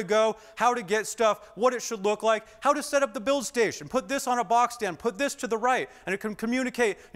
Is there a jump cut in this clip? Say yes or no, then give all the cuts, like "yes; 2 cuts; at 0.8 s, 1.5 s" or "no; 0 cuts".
no; 0 cuts